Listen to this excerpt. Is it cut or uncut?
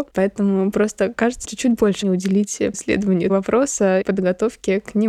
cut